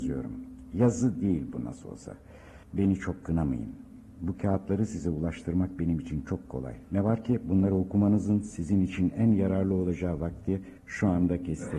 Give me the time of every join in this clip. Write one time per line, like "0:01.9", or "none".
0:02.6
0:10.8